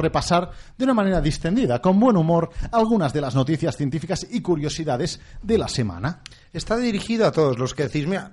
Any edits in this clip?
no; 0 cuts

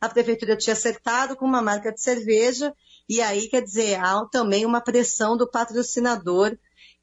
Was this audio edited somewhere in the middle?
no; 0 cuts

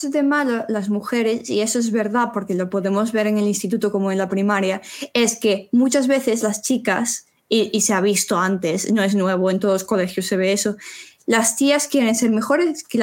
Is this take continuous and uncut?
yes; 0 cuts

